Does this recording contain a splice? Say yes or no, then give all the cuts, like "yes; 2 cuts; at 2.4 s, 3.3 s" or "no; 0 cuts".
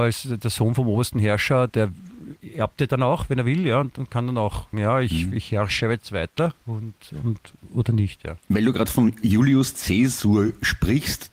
yes; 4 cuts; at 1.7 s, 4.7 s, 6.6 s, 8.4 s